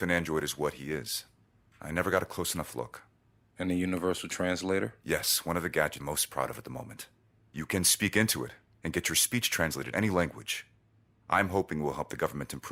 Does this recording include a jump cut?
yes; 2 cuts; at 6.0 s, 9.9 s

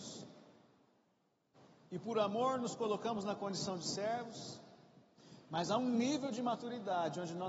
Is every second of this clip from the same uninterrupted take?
yes; 0 cuts

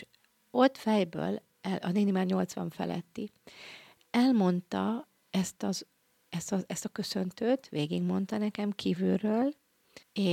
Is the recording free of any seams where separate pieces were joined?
yes; 0 cuts

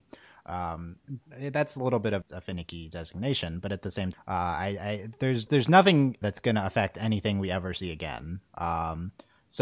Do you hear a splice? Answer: yes; 5 cuts; at 1.2 s, 2.2 s, 4.1 s, 5.5 s, 6.2 s

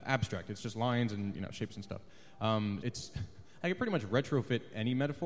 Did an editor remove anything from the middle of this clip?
yes; 1 cut; at 2.8 s

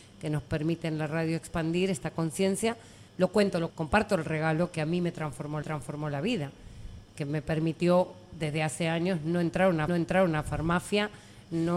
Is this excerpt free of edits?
no; 4 cuts; at 3.1 s, 3.7 s, 5.6 s, 9.9 s

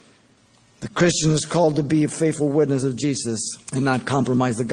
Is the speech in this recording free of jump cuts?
no; 1 cut; at 3.6 s

